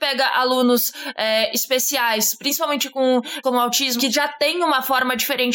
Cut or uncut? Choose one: cut